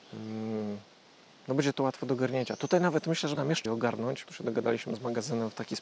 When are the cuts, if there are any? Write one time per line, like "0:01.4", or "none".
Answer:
0:03.4
0:03.7
0:04.2